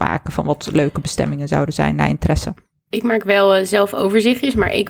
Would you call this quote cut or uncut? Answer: uncut